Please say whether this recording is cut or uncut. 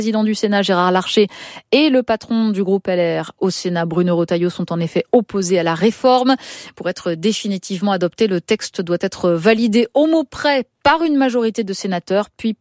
uncut